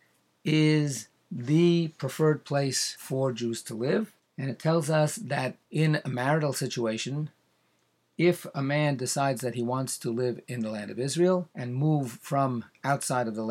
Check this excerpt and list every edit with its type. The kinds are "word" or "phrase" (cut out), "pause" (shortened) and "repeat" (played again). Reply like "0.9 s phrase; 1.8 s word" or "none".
5.6 s pause; 11.5 s pause